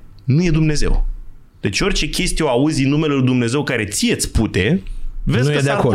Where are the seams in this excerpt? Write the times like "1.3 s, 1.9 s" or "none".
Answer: 1.5 s